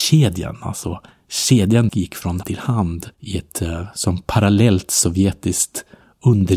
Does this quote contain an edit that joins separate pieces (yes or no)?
yes